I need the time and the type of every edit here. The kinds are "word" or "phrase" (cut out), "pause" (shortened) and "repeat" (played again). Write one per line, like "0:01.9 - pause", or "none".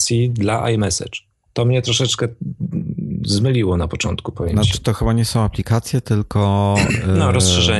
none